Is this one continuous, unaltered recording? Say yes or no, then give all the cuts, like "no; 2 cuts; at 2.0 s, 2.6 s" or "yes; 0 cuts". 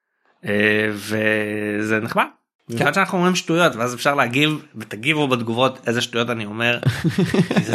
yes; 0 cuts